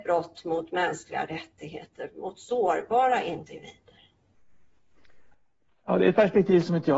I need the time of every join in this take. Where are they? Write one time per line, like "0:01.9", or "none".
none